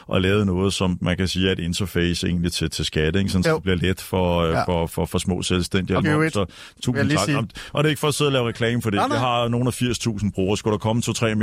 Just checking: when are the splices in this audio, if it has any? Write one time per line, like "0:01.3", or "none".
0:06.0